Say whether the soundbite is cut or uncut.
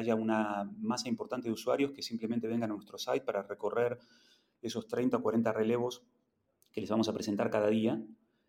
uncut